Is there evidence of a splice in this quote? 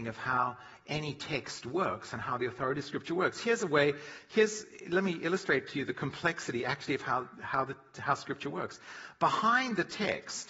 no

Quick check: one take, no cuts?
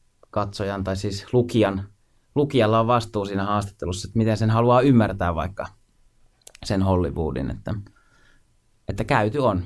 yes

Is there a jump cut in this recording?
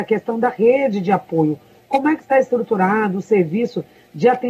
no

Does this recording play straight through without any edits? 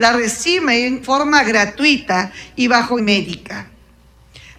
no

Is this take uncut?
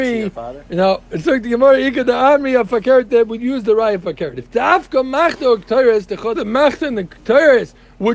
no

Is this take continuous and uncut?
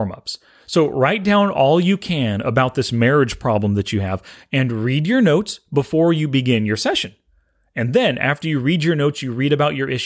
yes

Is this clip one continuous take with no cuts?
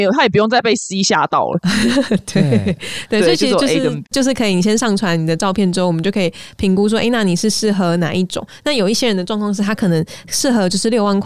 no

